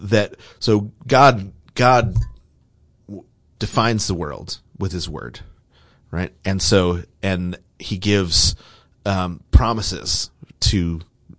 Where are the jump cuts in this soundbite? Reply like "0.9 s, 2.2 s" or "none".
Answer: 3.6 s